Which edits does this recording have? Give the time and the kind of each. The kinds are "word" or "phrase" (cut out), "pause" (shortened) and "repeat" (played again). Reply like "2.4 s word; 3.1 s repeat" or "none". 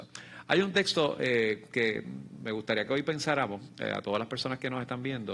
none

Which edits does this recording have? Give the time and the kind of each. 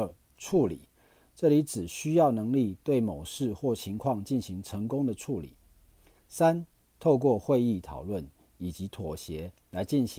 none

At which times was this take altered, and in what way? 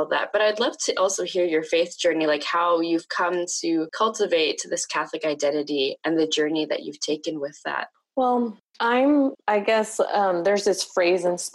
none

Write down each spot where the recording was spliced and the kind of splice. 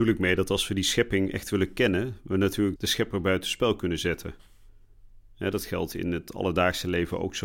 2.8 s word

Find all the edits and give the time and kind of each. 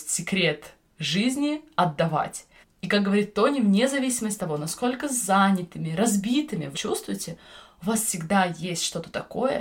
2.6 s pause; 4.4 s word; 6.7 s word

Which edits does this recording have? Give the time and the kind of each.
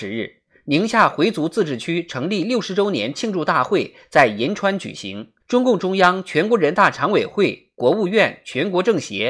5.4 s pause

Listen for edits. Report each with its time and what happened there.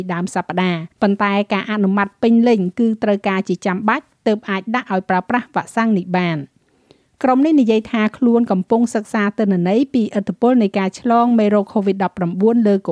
0.9 s pause

